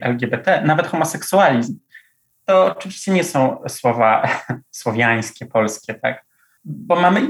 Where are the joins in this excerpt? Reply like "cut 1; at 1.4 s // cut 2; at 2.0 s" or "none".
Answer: none